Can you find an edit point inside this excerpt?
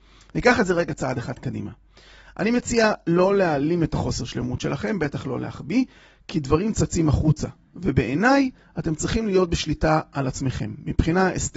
no; 0 cuts

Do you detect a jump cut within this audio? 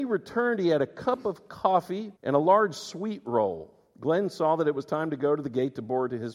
yes; 1 cut; at 2.2 s

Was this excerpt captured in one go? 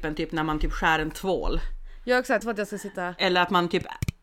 no; 1 cut; at 2.4 s

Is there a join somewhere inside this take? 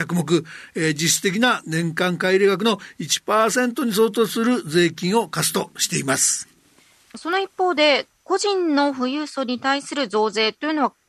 no; 0 cuts

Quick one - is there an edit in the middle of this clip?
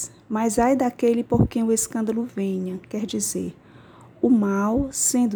no; 0 cuts

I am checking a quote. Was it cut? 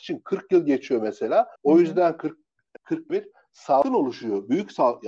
yes; 3 cuts; at 1.5 s, 2.8 s, 3.1 s

